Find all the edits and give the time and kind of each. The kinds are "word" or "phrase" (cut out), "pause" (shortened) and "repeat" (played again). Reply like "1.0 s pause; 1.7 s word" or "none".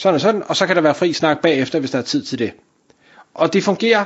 none

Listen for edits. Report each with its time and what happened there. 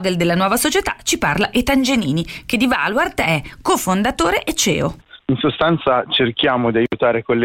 none

